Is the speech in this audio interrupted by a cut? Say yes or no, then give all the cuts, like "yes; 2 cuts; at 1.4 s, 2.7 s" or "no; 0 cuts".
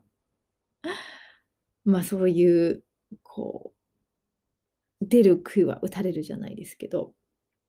no; 0 cuts